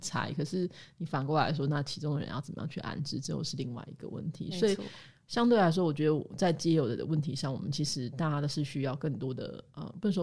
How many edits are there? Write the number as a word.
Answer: zero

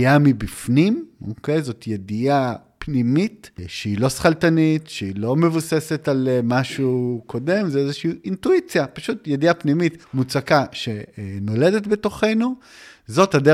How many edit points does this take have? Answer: one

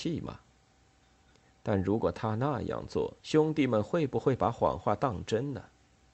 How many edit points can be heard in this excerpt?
one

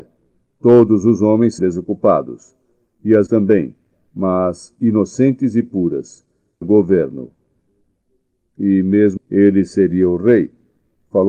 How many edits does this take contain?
four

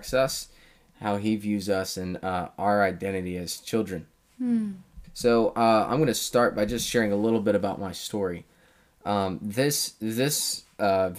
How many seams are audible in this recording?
one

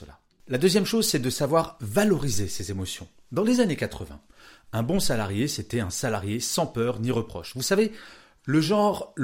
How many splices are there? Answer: zero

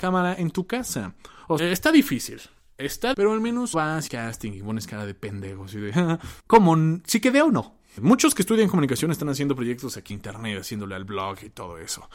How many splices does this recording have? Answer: six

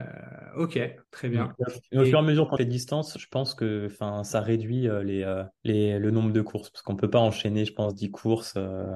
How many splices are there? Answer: three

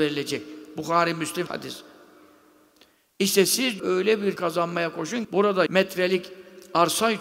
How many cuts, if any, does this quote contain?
five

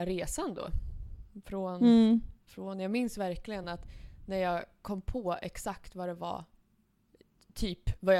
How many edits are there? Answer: zero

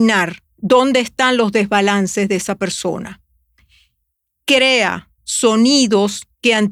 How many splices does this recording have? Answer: one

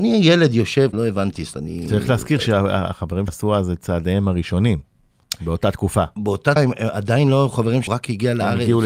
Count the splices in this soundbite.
five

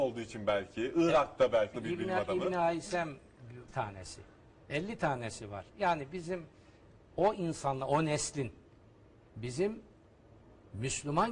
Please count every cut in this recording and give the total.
two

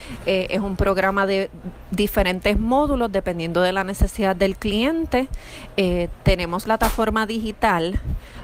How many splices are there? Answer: one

